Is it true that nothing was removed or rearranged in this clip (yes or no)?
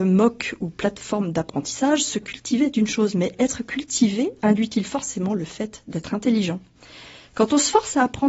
yes